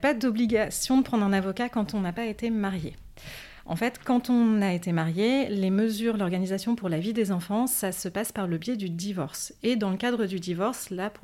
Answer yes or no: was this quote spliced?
no